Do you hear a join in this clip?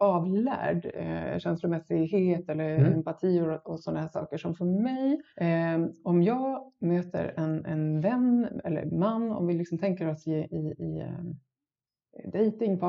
yes; 1 cut; at 5.3 s

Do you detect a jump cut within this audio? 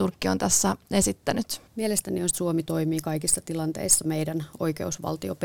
yes; 2 cuts; at 1.7 s, 2.3 s

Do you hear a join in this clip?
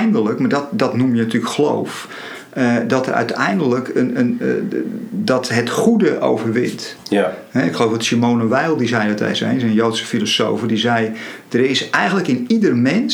no; 0 cuts

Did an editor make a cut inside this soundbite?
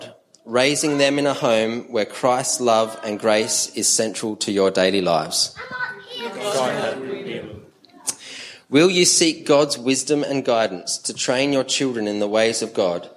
no; 0 cuts

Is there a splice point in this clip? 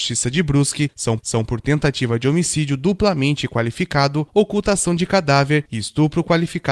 yes; 1 cut; at 1.2 s

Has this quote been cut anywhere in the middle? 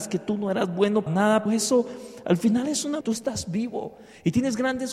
yes; 3 cuts; at 1.1 s, 1.5 s, 3.0 s

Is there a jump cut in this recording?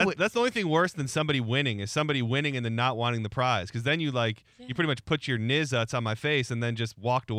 no; 0 cuts

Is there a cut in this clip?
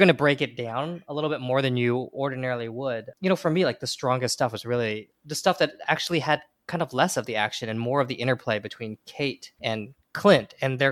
no; 0 cuts

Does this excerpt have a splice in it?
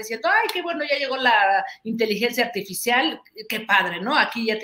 no; 0 cuts

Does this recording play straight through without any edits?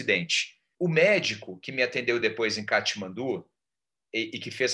yes; 0 cuts

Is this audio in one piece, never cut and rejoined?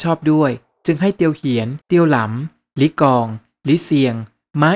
no; 1 cut; at 1.8 s

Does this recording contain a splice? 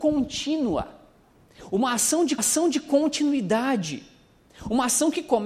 yes; 1 cut; at 2.4 s

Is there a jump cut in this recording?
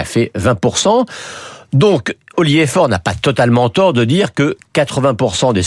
no; 0 cuts

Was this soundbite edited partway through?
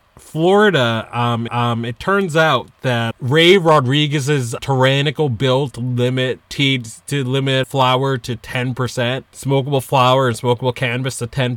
yes; 6 cuts; at 1.5 s, 3.1 s, 4.6 s, 6.5 s, 7.6 s, 9.3 s

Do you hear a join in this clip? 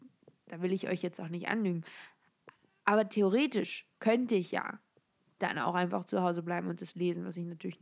no; 0 cuts

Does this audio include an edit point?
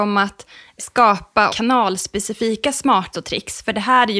yes; 2 cuts; at 1.5 s, 3.1 s

